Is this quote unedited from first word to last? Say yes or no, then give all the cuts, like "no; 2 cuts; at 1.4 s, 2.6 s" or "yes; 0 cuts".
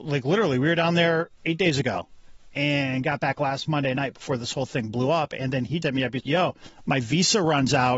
no; 2 cuts; at 5.8 s, 6.2 s